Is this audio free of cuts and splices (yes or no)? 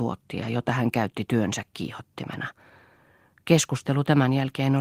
yes